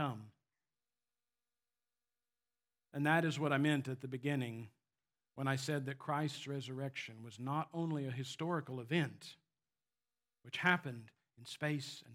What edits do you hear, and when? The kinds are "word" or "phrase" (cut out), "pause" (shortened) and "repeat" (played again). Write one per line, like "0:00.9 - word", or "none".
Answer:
none